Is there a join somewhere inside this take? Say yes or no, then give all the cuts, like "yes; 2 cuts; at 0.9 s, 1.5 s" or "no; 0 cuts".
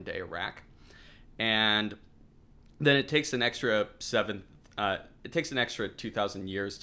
no; 0 cuts